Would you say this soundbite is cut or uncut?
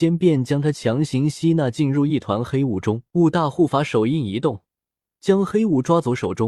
cut